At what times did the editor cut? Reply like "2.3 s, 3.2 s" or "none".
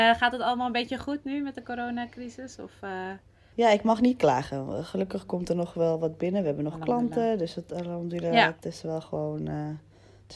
3.5 s

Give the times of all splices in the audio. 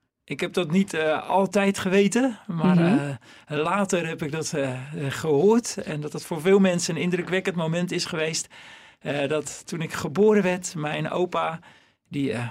none

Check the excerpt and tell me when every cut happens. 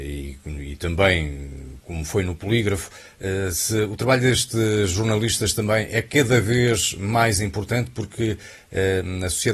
none

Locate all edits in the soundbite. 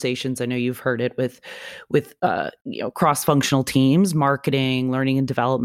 none

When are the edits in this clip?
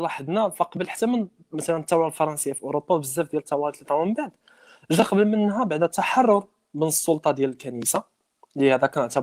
none

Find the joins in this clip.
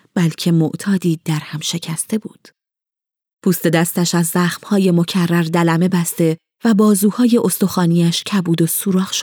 none

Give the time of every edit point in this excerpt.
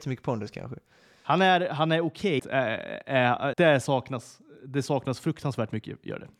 2.4 s, 3.5 s

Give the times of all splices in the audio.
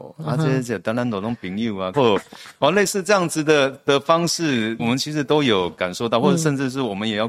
1.9 s, 4.8 s

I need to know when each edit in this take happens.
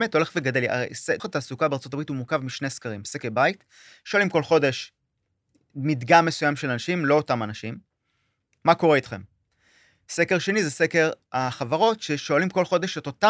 1.2 s, 3.2 s

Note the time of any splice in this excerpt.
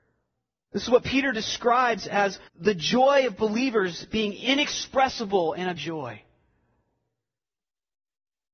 2.5 s, 5.8 s

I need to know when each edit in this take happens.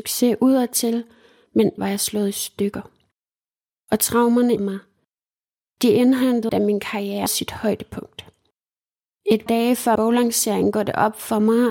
1.8 s, 4.6 s, 6.5 s, 7.3 s, 9.5 s, 10.0 s

